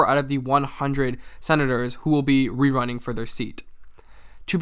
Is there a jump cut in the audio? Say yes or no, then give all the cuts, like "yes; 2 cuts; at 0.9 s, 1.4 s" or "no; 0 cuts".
no; 0 cuts